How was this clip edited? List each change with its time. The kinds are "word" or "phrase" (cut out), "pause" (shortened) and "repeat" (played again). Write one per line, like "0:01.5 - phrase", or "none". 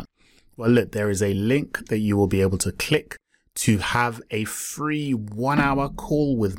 none